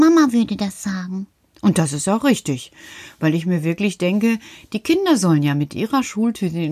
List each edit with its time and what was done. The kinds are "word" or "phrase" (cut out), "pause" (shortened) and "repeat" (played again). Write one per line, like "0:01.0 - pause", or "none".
none

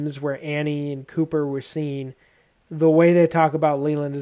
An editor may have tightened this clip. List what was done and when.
none

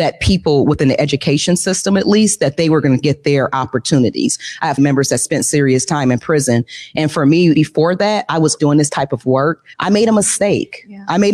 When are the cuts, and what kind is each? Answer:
0:04.8 - phrase
0:07.5 - word
0:08.6 - word
0:09.7 - pause

